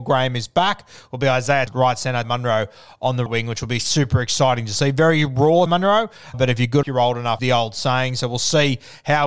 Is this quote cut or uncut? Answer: cut